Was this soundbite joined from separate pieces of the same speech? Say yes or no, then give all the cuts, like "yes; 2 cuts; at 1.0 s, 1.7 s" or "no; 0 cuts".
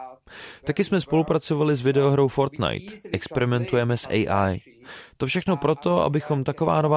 no; 0 cuts